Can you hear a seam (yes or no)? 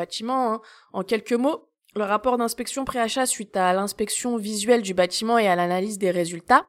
no